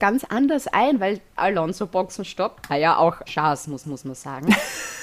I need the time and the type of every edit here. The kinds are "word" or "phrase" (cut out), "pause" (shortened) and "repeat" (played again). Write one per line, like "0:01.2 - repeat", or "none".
0:01.4 - word
0:02.7 - word
0:03.3 - word
0:03.8 - repeat